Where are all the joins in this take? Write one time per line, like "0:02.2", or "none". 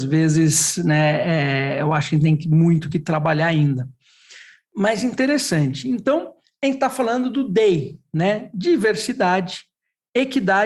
none